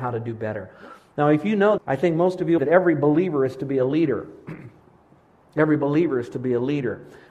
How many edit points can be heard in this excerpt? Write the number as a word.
two